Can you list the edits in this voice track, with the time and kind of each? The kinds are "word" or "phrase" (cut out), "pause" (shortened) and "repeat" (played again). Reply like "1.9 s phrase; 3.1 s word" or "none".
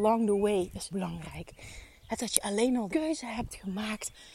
0.9 s word; 2.2 s word; 2.9 s word